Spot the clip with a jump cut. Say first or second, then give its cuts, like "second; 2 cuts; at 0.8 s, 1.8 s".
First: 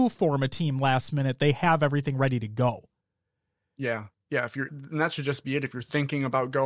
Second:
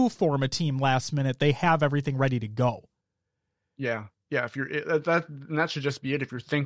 first; 1 cut; at 4.7 s